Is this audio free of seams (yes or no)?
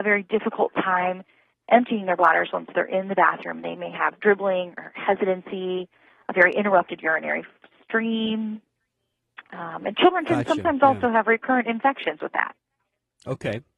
yes